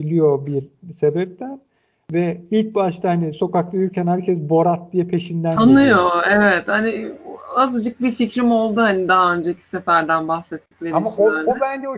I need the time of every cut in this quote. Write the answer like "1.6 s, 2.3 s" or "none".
none